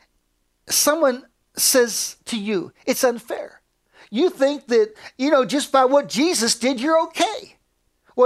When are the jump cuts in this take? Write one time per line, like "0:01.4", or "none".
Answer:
none